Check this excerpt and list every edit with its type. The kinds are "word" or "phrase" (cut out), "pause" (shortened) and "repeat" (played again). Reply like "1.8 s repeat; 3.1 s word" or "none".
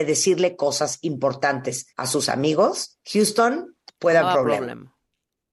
1.9 s pause; 3.0 s pause; 4.2 s word